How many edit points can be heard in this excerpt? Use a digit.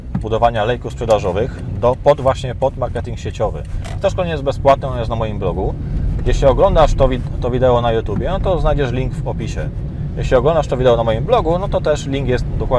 0